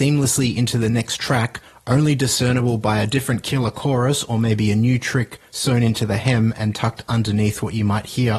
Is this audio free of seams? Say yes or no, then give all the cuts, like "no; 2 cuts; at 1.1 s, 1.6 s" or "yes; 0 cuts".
yes; 0 cuts